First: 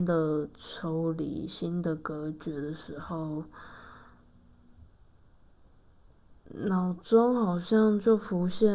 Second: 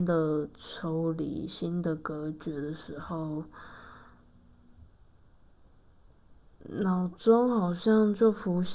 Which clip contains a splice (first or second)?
first